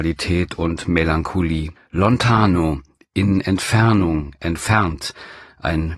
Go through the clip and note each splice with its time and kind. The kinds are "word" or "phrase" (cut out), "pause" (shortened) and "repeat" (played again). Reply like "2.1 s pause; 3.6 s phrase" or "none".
1.8 s pause